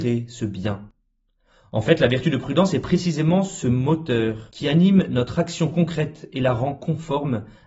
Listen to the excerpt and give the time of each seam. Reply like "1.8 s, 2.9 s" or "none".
none